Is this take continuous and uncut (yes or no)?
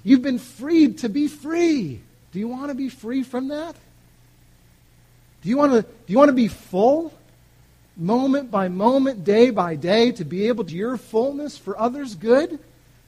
no